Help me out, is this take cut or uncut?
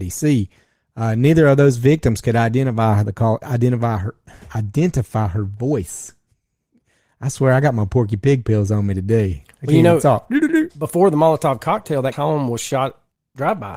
cut